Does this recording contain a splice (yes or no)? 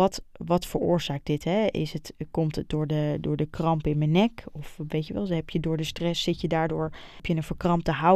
no